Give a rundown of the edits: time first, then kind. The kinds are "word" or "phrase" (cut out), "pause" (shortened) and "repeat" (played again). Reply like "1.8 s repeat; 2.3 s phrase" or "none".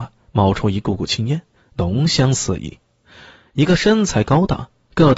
none